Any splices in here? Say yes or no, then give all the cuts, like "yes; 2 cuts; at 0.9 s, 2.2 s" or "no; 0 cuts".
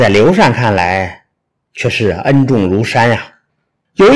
no; 0 cuts